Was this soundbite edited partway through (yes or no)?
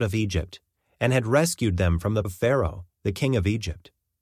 yes